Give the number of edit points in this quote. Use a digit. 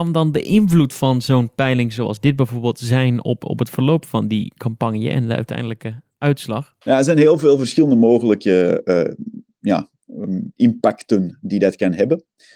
1